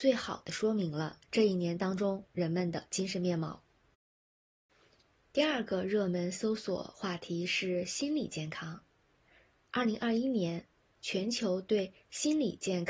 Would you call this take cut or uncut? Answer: uncut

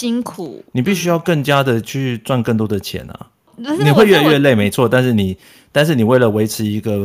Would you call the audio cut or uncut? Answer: uncut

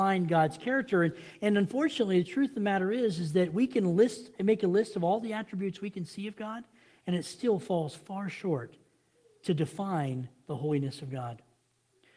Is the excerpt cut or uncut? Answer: uncut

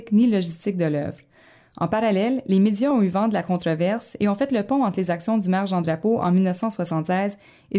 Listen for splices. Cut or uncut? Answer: uncut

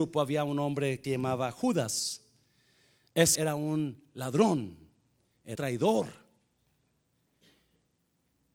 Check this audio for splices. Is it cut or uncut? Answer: cut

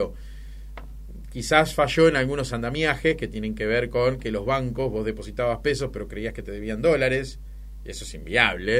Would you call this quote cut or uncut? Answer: uncut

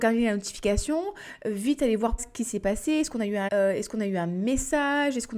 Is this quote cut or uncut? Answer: cut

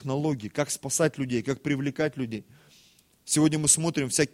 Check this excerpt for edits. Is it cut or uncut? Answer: uncut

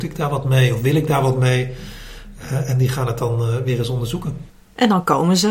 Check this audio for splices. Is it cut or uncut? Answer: uncut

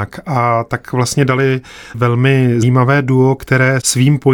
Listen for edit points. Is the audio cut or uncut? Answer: cut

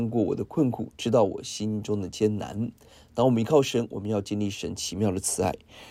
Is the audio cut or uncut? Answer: uncut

